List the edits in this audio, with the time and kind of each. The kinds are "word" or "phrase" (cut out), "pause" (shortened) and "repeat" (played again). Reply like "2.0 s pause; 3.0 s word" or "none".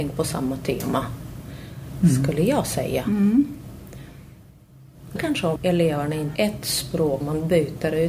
5.2 s word; 5.6 s word; 6.4 s word; 7.2 s word